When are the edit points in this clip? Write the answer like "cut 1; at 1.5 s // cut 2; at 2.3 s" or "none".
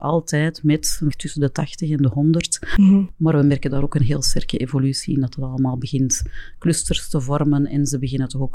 cut 1; at 1.1 s